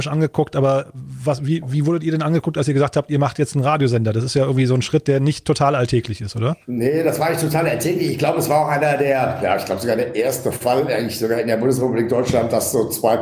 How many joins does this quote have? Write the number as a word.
one